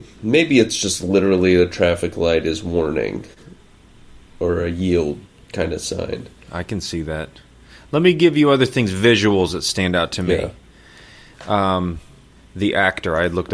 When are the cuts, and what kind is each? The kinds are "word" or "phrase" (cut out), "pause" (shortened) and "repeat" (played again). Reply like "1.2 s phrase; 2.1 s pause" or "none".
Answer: none